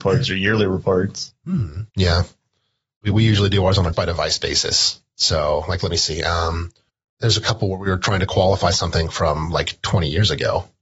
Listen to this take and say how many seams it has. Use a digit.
3